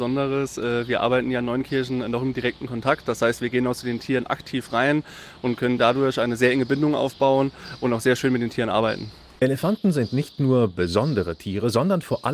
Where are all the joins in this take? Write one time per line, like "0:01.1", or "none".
none